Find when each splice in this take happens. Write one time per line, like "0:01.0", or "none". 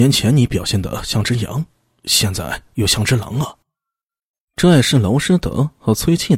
0:03.6

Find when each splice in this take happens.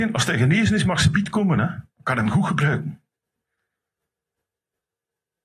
0:01.9

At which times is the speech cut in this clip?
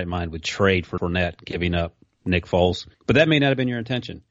0:01.0
0:02.9

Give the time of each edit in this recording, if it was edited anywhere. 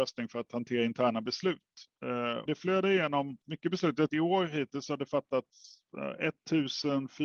0:02.5
0:03.4
0:04.1

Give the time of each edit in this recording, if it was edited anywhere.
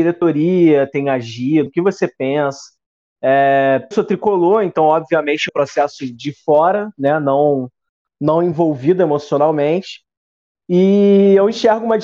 0:01.7
0:03.9
0:05.5

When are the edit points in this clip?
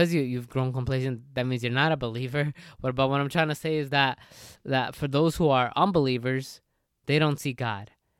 none

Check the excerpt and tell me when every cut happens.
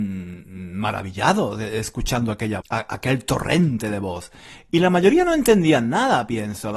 0:02.6

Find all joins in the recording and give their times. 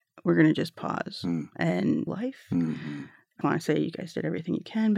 0:02.1
0:03.4

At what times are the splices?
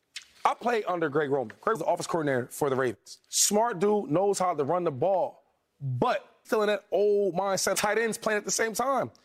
0:01.7
0:03.2
0:06.4
0:07.7

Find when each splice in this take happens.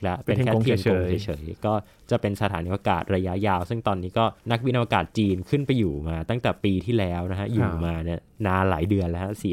0:04.4

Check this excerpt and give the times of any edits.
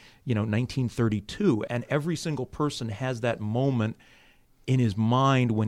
0:01.7

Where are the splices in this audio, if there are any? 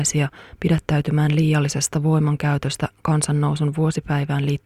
none

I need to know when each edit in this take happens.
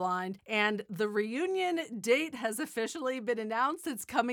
none

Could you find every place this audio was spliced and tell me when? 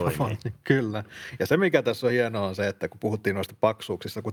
none

